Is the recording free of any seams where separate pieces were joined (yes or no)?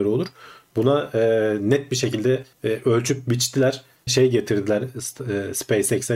no